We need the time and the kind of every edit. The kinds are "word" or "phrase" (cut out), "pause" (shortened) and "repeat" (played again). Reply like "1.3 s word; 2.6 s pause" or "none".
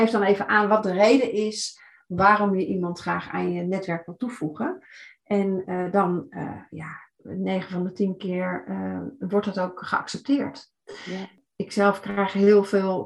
none